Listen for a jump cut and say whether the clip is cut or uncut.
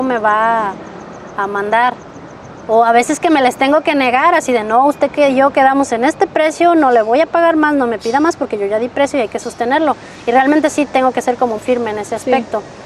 cut